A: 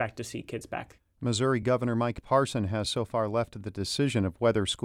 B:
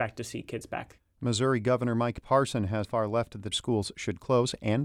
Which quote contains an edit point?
B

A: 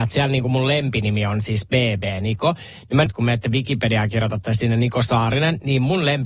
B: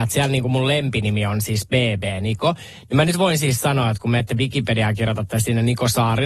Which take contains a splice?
A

